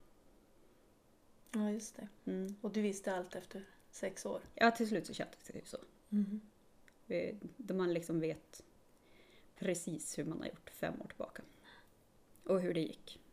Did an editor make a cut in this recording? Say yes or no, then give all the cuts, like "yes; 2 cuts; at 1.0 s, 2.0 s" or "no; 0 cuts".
yes; 1 cut; at 2.2 s